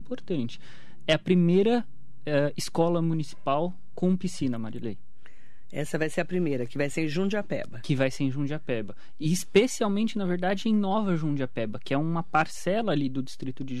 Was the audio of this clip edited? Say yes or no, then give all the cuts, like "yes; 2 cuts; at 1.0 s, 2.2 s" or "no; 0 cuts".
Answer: no; 0 cuts